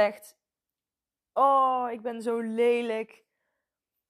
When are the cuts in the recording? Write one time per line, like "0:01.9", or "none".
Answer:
none